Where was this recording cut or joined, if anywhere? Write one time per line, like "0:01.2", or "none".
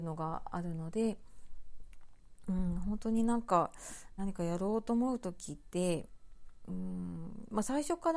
0:04.2